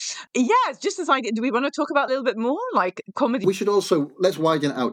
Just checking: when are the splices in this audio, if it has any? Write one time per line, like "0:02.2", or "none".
0:02.1
0:03.4